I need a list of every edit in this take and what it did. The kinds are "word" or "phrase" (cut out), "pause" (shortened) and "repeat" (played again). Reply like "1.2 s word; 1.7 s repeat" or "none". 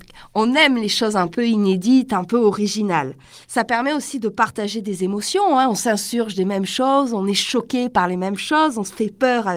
3.4 s pause